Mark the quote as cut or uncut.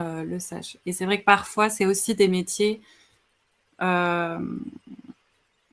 uncut